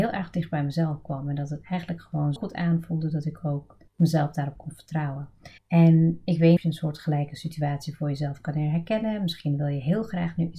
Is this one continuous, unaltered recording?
no; 4 cuts; at 2.4 s, 3.9 s, 5.6 s, 6.6 s

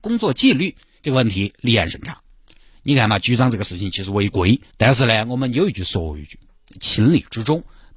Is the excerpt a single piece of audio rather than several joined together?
no; 1 cut; at 4.7 s

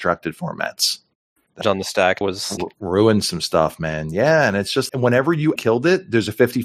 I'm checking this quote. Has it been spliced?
yes; 5 cuts; at 1.6 s, 2.2 s, 2.6 s, 4.9 s, 5.6 s

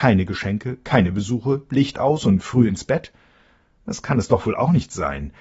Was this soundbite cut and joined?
no; 0 cuts

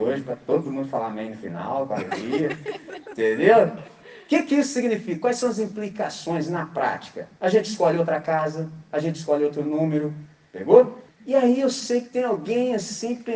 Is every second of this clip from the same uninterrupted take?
no; 1 cut; at 11.1 s

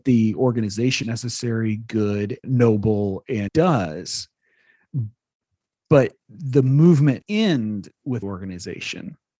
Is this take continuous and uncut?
no; 6 cuts; at 1.0 s, 2.4 s, 3.5 s, 6.2 s, 7.2 s, 8.2 s

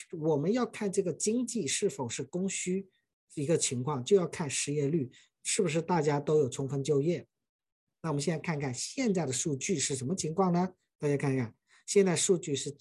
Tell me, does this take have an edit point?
no; 0 cuts

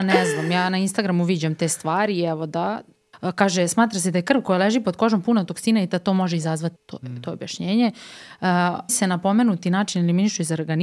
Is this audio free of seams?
no; 2 cuts; at 6.8 s, 8.9 s

